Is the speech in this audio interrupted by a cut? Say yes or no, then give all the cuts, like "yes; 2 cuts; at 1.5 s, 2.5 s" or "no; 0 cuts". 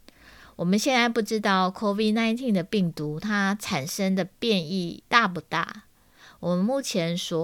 no; 0 cuts